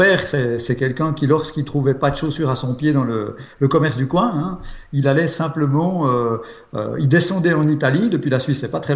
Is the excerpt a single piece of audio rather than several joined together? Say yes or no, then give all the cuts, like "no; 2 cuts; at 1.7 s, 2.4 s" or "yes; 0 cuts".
yes; 0 cuts